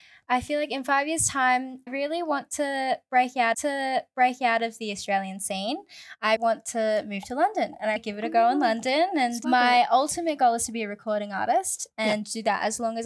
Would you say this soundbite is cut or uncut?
cut